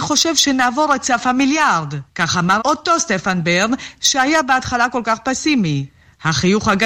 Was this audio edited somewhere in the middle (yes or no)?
yes